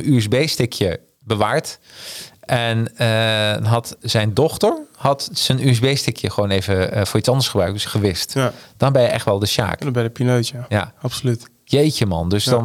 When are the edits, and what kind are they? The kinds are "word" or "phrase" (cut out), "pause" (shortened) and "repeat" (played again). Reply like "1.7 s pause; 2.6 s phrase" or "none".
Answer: 7.8 s word